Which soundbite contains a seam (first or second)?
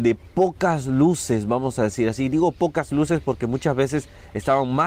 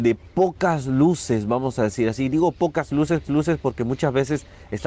second